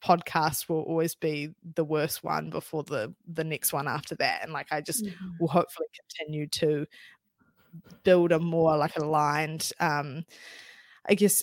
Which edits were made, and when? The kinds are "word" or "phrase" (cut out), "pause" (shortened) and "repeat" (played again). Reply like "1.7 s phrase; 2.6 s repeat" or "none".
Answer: none